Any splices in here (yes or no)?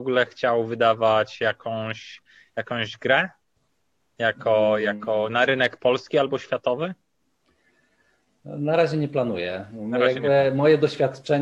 no